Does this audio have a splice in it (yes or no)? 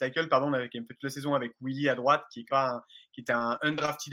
yes